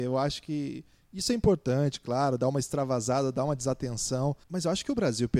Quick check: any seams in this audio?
yes; 1 cut; at 4.4 s

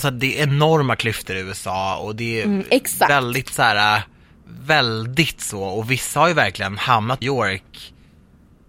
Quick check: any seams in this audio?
yes; 1 cut; at 7.2 s

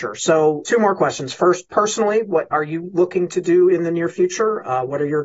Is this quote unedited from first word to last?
yes; 0 cuts

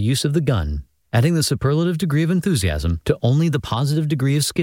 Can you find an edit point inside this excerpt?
no; 0 cuts

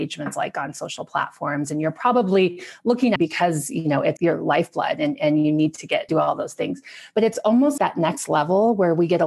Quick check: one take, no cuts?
no; 4 cuts; at 3.2 s, 4.2 s, 6.1 s, 7.8 s

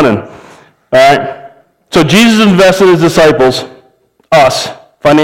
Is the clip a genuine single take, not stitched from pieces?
yes; 0 cuts

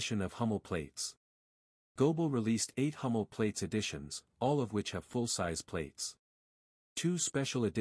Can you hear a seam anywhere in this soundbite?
no; 0 cuts

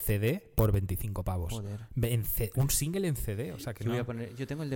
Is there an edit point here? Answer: no; 0 cuts

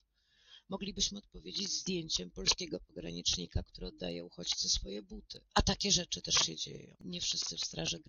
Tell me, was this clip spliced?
no; 0 cuts

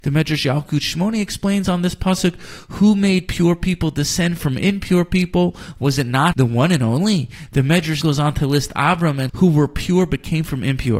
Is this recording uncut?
no; 3 cuts; at 6.3 s, 8.0 s, 9.3 s

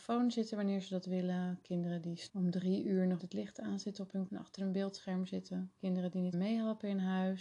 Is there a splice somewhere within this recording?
yes; 4 cuts; at 2.3 s, 3.2 s, 4.3 s, 6.3 s

